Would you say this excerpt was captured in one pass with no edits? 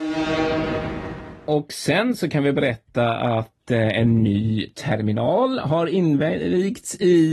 yes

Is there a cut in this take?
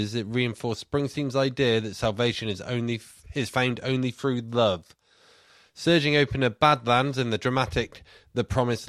no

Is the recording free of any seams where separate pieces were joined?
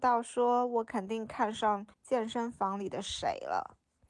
no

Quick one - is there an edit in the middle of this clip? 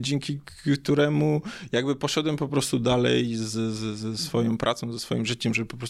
no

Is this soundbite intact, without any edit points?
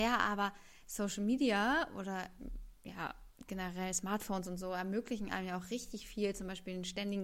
yes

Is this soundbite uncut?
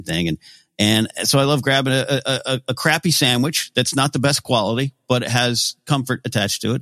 yes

